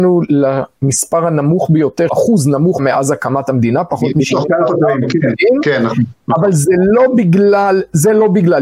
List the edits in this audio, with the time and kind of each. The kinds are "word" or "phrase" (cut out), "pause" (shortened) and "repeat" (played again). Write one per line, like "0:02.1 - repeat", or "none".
0:02.1 - word
0:02.8 - phrase